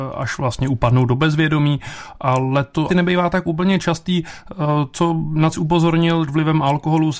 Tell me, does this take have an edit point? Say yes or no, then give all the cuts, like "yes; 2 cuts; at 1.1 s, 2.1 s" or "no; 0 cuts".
yes; 3 cuts; at 2.9 s, 5.5 s, 6.3 s